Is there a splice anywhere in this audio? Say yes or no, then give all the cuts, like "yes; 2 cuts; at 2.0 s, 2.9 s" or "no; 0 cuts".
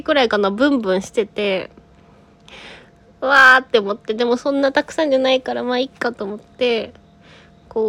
no; 0 cuts